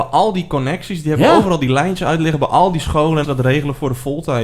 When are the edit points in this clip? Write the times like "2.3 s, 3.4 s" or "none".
3.2 s